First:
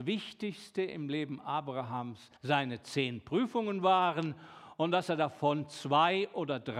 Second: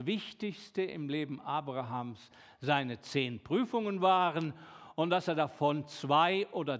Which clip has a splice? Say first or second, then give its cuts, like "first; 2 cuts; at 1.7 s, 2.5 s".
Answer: first; 1 cut; at 2.4 s